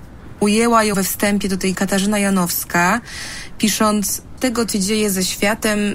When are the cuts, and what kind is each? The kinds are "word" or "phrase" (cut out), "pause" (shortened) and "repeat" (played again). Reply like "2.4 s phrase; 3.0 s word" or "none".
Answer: 0.9 s phrase; 1.7 s word; 4.4 s word; 4.7 s word